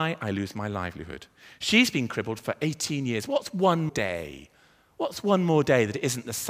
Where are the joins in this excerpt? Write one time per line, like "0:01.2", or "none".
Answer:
0:03.9